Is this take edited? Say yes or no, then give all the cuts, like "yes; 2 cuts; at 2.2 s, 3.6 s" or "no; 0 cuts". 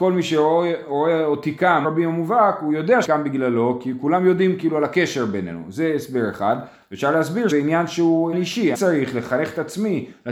yes; 5 cuts; at 1.8 s, 3.0 s, 7.5 s, 8.3 s, 8.7 s